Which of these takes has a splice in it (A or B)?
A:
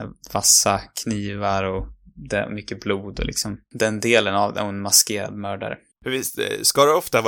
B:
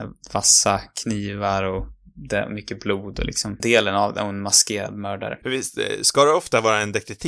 B